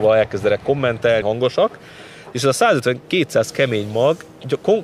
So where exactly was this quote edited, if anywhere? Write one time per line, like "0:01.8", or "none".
0:01.2